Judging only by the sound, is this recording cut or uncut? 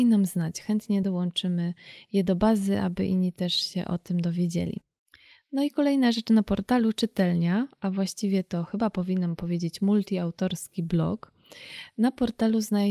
uncut